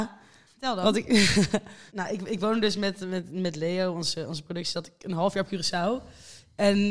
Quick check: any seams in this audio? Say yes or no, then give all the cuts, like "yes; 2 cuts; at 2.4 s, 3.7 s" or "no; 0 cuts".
no; 0 cuts